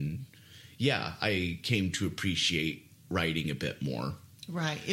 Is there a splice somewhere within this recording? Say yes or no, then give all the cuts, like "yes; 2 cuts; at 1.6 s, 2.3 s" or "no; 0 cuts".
no; 0 cuts